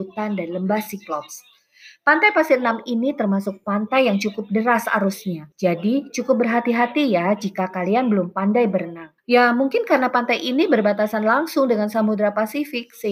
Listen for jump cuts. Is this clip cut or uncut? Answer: cut